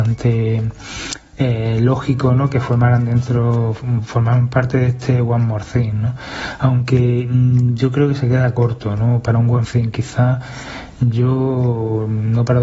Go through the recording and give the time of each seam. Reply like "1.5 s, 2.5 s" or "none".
9.6 s